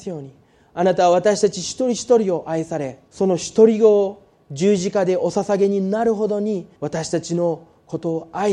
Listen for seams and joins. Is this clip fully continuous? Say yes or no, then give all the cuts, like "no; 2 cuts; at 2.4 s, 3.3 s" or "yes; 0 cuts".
no; 2 cuts; at 3.0 s, 6.7 s